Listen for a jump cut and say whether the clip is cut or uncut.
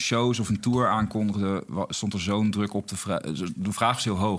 uncut